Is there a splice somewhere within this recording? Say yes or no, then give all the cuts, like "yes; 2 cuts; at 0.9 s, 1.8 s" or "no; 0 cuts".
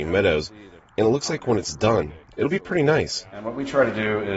no; 0 cuts